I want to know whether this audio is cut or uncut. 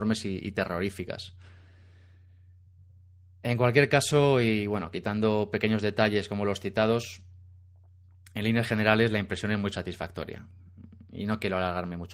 uncut